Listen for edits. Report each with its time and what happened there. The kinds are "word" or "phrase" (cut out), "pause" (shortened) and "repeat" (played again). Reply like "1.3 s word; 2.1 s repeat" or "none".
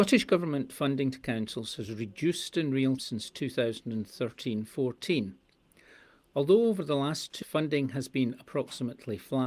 3.0 s word; 7.4 s word